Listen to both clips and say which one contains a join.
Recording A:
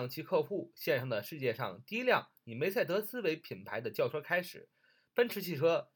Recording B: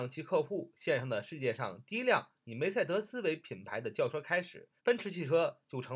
B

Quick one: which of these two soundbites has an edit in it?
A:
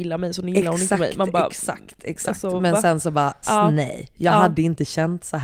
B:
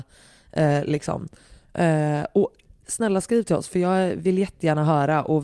A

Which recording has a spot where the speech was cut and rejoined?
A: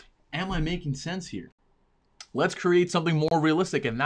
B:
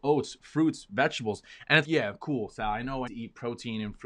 B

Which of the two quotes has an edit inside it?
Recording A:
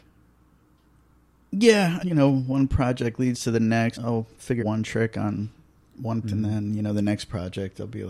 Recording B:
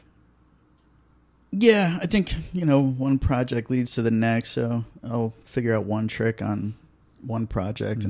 A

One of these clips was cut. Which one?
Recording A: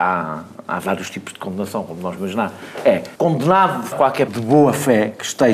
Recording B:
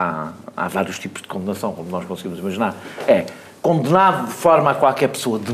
A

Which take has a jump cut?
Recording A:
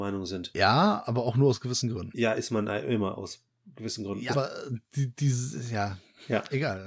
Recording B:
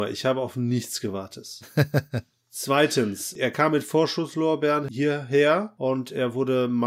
A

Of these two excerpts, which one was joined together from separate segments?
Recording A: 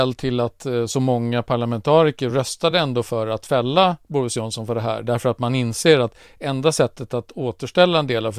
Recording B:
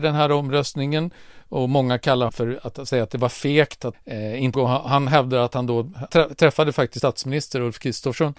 B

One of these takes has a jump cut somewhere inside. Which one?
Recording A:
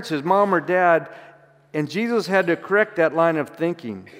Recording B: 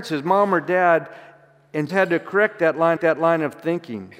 B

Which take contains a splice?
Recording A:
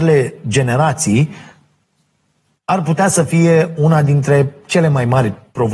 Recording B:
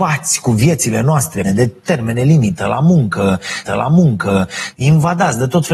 B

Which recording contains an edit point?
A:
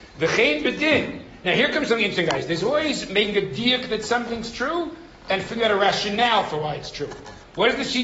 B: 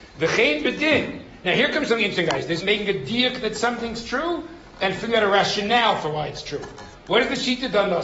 B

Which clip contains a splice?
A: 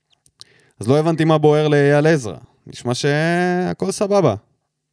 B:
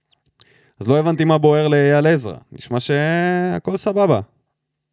B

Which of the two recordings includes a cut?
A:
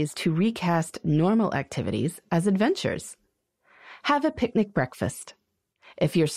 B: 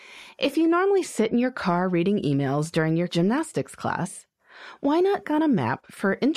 B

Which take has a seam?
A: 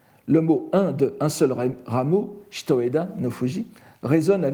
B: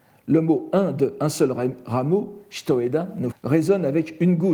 B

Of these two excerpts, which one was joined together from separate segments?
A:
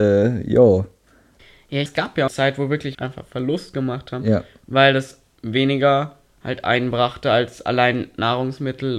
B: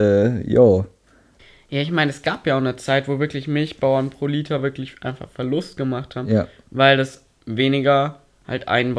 A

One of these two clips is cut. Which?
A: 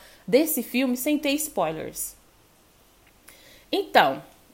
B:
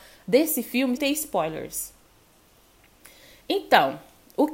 B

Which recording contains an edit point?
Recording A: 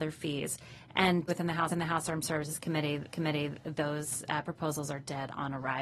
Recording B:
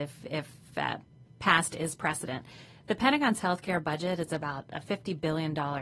A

